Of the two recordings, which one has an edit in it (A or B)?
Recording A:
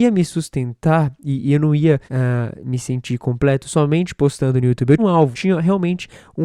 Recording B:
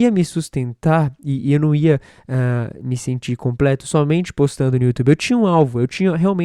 A